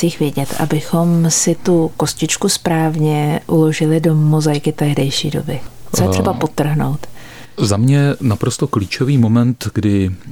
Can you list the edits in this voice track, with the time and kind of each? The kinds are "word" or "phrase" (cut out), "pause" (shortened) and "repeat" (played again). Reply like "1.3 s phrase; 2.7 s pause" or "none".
none